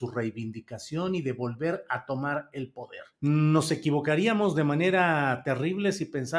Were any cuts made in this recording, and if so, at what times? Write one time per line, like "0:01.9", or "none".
0:03.1